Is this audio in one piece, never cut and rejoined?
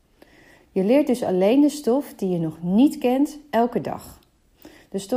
yes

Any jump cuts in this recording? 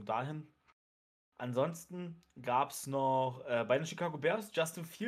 no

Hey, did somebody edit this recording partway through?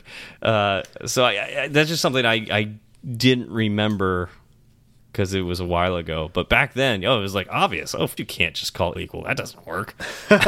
yes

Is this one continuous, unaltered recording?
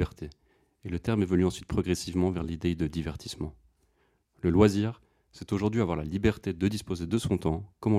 yes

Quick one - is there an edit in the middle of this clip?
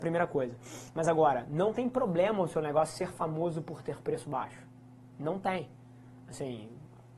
no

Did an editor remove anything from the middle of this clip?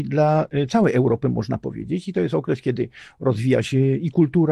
no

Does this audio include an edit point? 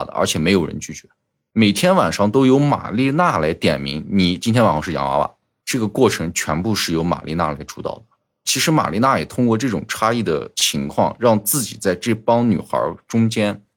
no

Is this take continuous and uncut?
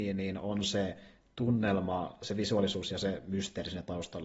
yes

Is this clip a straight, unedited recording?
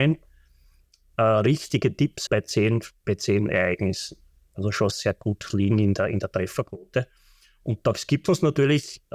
no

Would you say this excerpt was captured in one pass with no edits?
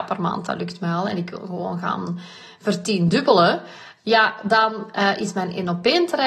yes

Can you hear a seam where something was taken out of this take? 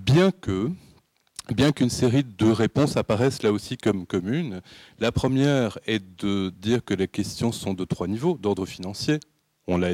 no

